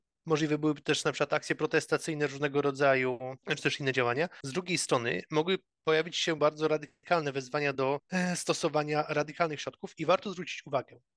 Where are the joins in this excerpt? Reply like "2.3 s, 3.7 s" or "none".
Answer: none